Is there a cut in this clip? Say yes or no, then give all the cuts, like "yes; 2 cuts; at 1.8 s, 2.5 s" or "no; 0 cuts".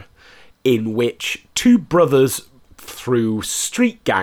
yes; 1 cut; at 2.9 s